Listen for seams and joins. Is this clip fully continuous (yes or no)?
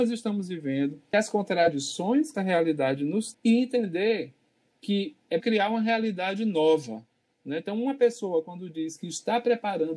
no